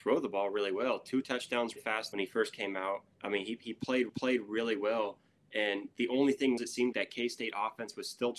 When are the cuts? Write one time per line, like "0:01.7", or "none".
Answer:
0:01.8
0:02.1
0:03.1
0:04.1
0:06.6
0:06.9